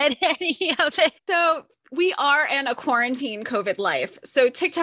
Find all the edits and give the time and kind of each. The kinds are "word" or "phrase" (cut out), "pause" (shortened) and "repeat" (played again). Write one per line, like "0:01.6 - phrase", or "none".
0:01.2 - pause